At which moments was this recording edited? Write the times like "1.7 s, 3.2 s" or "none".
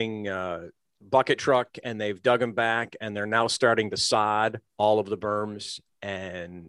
1.0 s, 4.7 s